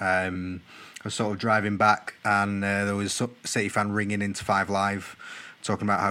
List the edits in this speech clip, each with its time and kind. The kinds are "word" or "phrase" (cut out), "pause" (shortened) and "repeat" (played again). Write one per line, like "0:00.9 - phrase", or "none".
none